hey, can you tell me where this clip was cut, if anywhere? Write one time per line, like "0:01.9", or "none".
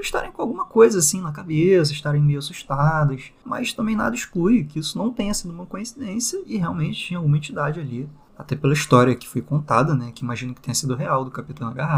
none